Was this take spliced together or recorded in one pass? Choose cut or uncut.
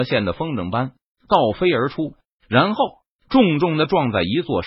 uncut